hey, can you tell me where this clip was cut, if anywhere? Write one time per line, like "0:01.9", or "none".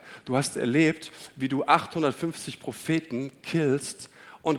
none